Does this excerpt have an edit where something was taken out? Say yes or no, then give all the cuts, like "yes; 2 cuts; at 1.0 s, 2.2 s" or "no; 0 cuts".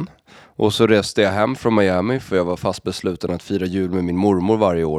no; 0 cuts